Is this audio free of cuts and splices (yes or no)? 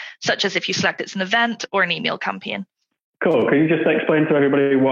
no